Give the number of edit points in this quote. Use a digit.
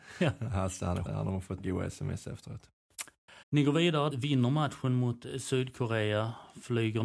4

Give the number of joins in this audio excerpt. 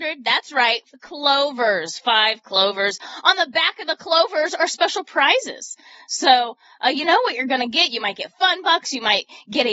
2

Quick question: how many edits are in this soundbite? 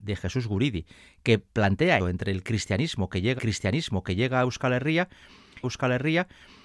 3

